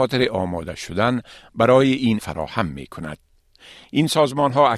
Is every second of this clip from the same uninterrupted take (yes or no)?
no